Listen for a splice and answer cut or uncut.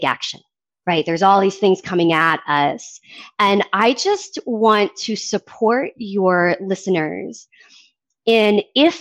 uncut